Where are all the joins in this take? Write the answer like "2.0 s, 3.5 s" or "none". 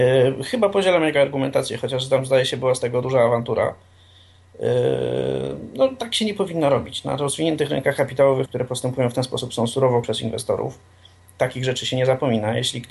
3.0 s, 8.5 s, 10.0 s